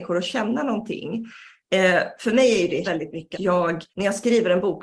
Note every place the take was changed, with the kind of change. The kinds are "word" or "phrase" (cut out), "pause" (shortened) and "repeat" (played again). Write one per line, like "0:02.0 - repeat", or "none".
0:02.8 - word
0:03.3 - word
0:03.9 - pause